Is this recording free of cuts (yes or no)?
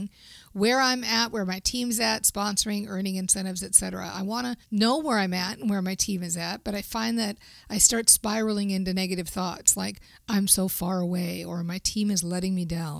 no